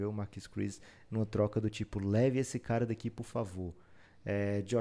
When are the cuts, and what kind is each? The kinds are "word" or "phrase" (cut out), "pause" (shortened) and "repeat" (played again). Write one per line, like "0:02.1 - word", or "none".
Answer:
none